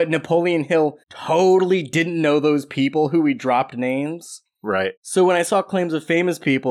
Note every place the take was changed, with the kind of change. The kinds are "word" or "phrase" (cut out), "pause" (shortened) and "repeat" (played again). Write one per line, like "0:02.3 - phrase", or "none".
0:01.0 - pause
0:05.0 - pause